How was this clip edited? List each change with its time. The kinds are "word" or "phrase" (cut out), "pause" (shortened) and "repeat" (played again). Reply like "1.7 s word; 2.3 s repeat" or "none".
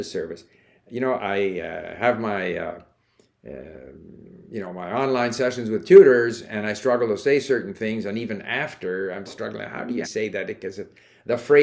1.2 s word; 4.4 s pause; 9.3 s word; 10.0 s word